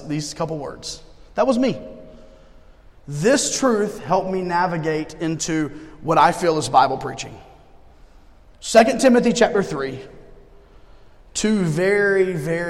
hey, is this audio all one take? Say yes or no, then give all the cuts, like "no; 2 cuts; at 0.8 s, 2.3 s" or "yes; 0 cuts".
yes; 0 cuts